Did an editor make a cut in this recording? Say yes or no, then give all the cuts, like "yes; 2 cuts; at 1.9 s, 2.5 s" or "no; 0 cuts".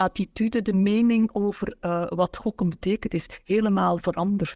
no; 0 cuts